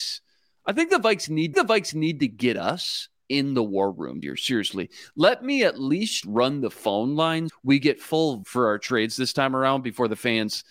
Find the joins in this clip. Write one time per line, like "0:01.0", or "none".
0:01.5
0:04.2
0:06.2
0:07.5
0:08.4